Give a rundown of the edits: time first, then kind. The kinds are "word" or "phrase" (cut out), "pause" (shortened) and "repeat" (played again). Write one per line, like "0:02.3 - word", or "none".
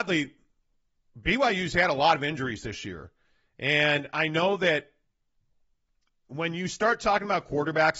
none